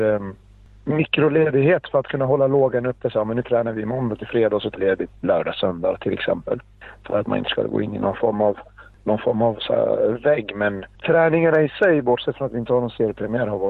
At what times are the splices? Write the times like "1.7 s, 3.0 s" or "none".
4.8 s, 10.9 s